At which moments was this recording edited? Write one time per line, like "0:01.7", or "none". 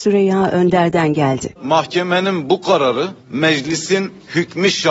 0:01.6
0:03.2